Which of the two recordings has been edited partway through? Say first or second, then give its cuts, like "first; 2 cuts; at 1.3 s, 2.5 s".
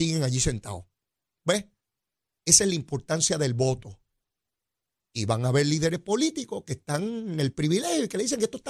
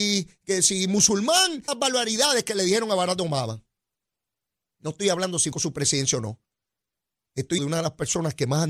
second; 3 cuts; at 1.7 s, 5.5 s, 7.6 s